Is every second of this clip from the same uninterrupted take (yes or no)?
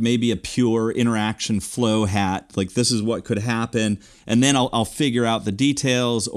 yes